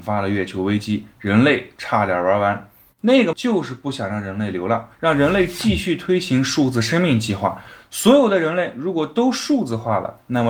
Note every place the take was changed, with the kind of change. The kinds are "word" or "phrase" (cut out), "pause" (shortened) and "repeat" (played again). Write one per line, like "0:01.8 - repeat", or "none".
0:03.3 - word
0:04.9 - pause